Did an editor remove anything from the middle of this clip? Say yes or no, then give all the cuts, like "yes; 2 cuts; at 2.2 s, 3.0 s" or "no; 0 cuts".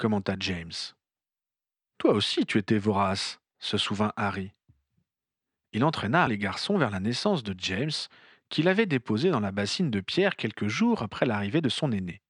yes; 1 cut; at 6.3 s